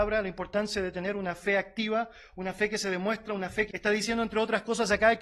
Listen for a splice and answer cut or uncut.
cut